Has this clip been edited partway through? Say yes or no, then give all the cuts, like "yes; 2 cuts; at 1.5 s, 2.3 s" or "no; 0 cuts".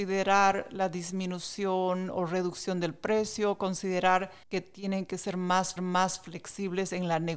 yes; 2 cuts; at 4.4 s, 5.8 s